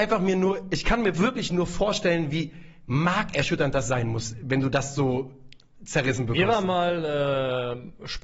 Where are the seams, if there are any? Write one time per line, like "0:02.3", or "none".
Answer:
none